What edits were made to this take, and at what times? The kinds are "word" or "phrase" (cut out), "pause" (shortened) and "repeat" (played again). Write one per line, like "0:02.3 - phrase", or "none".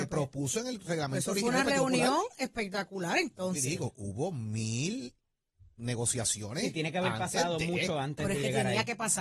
none